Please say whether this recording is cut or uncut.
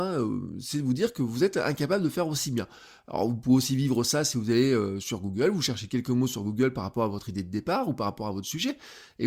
uncut